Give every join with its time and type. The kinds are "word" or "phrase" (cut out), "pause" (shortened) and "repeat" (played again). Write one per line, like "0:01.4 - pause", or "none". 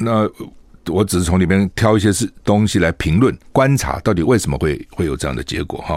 0:03.4 - pause